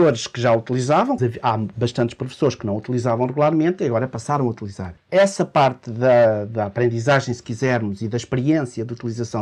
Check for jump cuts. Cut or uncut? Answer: cut